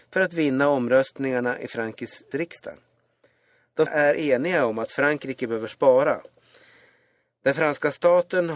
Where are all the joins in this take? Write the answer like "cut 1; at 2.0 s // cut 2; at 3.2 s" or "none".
cut 1; at 2.3 s // cut 2; at 3.9 s